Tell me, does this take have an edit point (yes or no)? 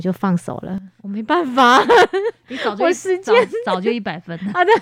no